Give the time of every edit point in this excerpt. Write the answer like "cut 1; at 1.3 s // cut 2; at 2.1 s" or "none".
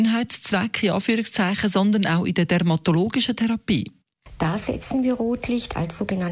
none